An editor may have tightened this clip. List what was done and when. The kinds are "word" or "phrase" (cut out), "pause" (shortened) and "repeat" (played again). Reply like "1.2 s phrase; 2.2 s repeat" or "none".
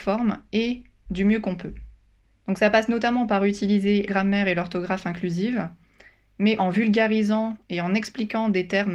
2.2 s pause; 4.1 s word; 6.6 s word